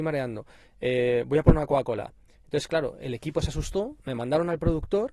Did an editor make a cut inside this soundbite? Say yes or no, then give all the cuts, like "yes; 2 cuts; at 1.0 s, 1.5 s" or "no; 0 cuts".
no; 0 cuts